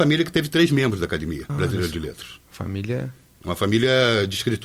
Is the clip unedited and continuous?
no; 1 cut; at 1.5 s

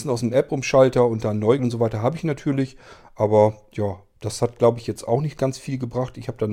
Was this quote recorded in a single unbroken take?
no; 1 cut; at 1.6 s

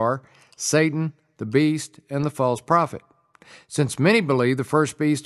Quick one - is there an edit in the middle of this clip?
no; 0 cuts

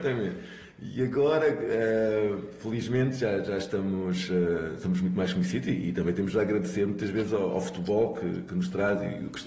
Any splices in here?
no; 0 cuts

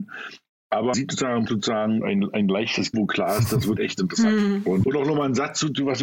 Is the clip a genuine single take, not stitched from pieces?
no; 6 cuts; at 0.9 s, 1.5 s, 2.0 s, 2.9 s, 3.8 s, 4.8 s

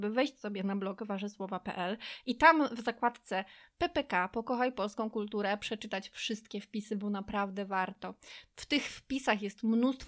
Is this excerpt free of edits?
yes; 0 cuts

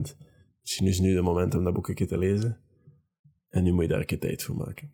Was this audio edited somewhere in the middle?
no; 0 cuts

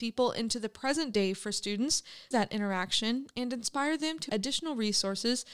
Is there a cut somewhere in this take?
yes; 2 cuts; at 2.3 s, 4.3 s

